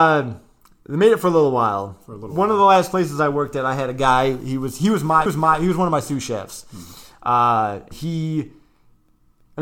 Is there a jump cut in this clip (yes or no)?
yes